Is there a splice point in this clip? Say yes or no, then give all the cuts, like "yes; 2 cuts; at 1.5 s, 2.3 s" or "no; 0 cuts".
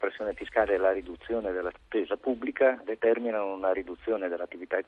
yes; 2 cuts; at 1.8 s, 2.8 s